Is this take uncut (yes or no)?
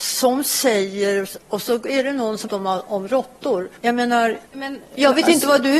no